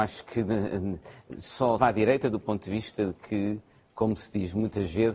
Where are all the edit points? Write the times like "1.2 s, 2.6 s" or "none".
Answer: 1.8 s